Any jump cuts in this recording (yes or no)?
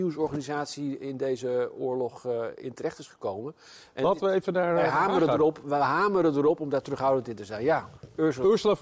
no